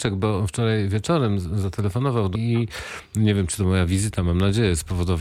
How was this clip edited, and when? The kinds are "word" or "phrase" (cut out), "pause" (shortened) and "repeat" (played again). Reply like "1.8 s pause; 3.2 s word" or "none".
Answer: 2.3 s phrase